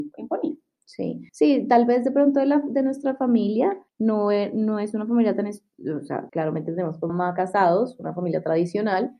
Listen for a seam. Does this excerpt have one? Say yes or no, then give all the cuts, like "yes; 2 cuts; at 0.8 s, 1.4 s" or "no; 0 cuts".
yes; 4 cuts; at 1.3 s, 3.9 s, 6.3 s, 7.1 s